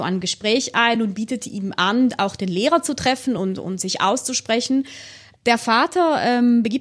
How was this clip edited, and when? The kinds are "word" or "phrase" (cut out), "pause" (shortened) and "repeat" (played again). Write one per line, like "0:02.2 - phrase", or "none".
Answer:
none